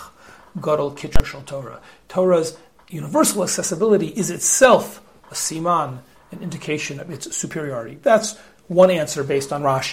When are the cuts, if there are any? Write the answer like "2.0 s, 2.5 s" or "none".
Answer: none